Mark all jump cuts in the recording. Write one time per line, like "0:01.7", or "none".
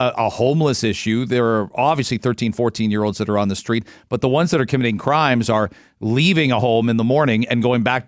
none